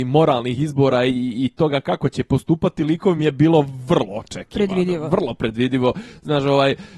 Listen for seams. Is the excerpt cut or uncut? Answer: uncut